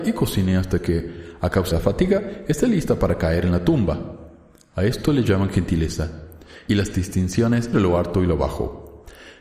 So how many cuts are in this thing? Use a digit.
2